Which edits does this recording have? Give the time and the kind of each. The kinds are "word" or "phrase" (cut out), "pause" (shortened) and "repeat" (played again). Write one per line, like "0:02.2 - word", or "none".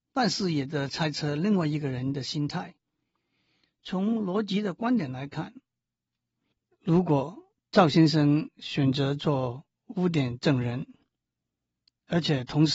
0:07.6 - pause
0:09.8 - pause